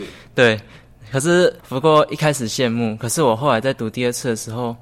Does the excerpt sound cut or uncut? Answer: cut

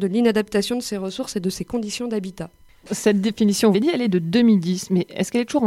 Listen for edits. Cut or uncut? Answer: cut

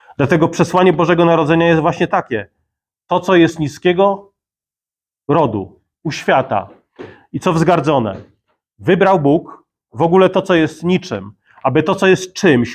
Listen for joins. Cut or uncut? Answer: uncut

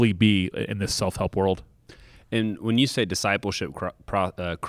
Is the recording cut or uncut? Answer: uncut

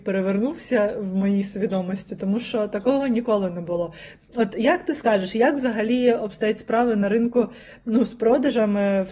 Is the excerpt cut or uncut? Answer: uncut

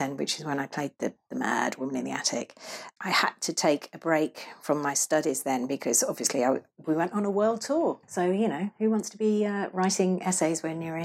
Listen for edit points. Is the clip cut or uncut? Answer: cut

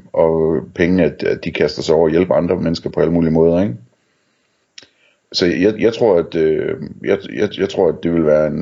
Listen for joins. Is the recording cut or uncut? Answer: uncut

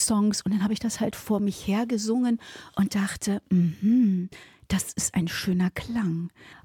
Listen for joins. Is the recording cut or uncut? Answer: uncut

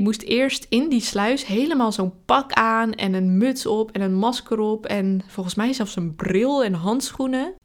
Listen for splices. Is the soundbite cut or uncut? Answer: uncut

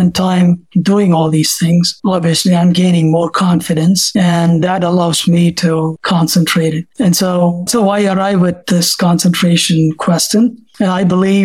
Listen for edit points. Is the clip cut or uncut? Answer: cut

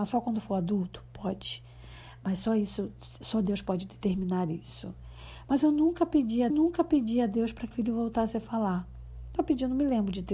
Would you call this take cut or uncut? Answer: cut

